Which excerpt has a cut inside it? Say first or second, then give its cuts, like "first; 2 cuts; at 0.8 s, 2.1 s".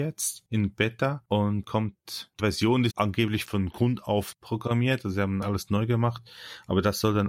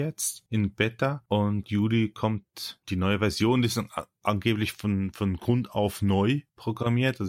first; 6 cuts; at 1.6 s, 2.4 s, 2.9 s, 3.5 s, 4.3 s, 5.4 s